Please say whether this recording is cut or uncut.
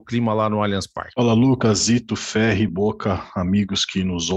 uncut